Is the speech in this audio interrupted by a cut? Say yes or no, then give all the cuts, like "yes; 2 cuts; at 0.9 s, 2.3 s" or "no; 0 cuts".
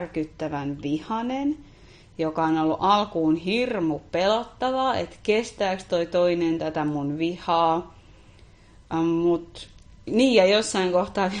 no; 0 cuts